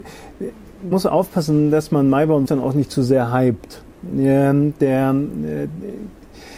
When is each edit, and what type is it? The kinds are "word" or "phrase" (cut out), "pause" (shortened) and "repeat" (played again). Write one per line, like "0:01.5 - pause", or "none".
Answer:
0:00.9 - word
0:02.5 - word